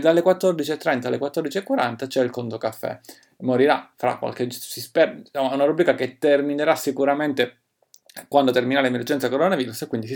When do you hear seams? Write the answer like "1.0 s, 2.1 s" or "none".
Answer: none